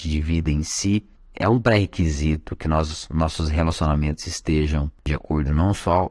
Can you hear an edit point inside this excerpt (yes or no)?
no